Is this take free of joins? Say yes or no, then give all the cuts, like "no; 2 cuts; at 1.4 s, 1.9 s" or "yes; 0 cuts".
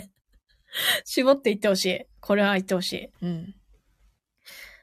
no; 2 cuts; at 2.1 s, 3.1 s